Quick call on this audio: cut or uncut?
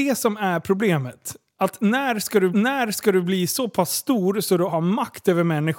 cut